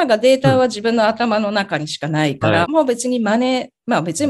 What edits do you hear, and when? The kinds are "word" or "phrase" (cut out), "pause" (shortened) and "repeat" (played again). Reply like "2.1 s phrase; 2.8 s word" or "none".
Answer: 2.6 s phrase